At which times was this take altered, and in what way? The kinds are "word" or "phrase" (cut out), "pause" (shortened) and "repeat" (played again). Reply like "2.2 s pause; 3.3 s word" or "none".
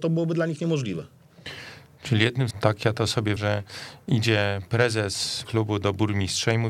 2.5 s word; 3.4 s word; 5.4 s word

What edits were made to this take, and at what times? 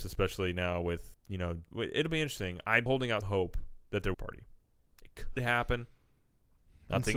1.1 s word; 1.7 s pause; 2.9 s word; 3.2 s word; 4.1 s phrase; 5.4 s word

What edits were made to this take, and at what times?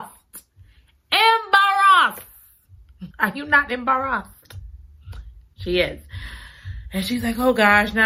3.1 s pause

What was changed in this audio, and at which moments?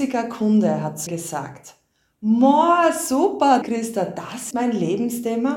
1.1 s word; 3.6 s word; 4.5 s word

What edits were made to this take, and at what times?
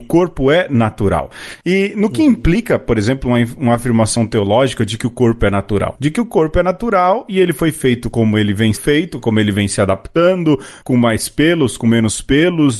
8.7 s word

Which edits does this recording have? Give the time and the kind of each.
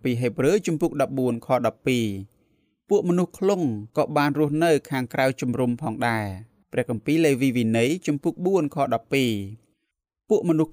3.9 s pause; 6.6 s pause

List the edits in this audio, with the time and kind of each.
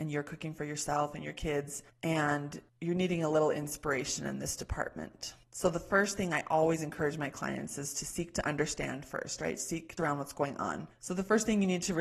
10.0 s phrase

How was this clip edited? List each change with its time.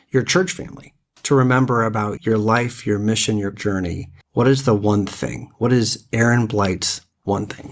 2.2 s word; 3.5 s phrase; 4.2 s pause

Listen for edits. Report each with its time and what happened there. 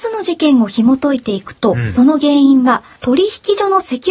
3.0 s pause

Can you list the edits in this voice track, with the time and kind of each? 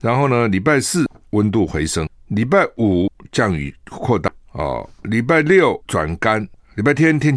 5.9 s pause

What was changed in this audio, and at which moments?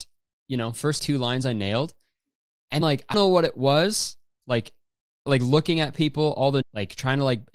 1.0 s word; 2.8 s word; 3.1 s word; 5.3 s word; 6.6 s word

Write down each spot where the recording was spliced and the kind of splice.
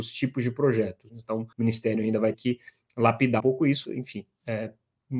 1.5 s pause; 2.3 s word; 3.4 s word; 3.8 s word

